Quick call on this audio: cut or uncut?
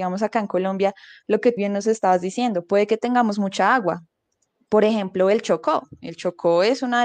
cut